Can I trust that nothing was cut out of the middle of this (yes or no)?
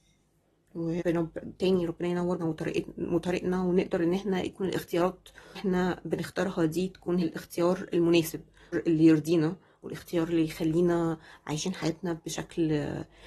no